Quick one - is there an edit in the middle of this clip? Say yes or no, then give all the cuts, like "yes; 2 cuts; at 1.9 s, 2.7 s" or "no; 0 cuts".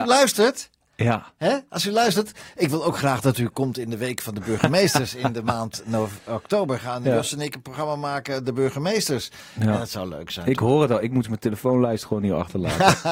yes; 1 cut; at 11.2 s